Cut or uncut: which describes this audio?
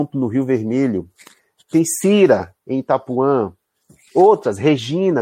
uncut